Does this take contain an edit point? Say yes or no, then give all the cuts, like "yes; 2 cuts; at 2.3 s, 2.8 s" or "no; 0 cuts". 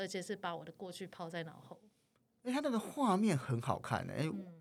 no; 0 cuts